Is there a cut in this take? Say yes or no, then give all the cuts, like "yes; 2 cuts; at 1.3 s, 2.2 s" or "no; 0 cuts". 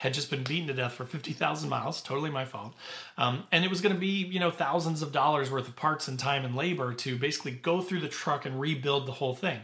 no; 0 cuts